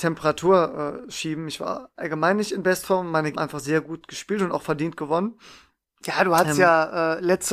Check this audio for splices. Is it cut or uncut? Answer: cut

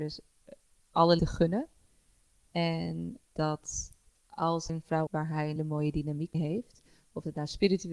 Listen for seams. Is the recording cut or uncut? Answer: cut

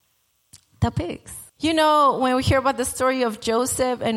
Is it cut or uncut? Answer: cut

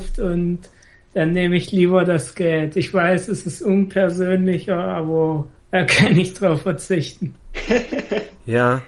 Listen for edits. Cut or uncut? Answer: cut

